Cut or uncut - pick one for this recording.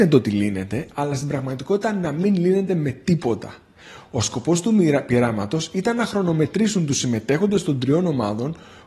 uncut